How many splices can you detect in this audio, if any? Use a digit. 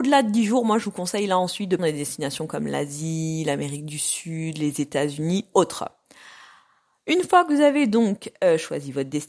2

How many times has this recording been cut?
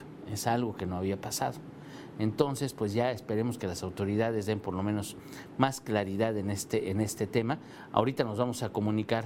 0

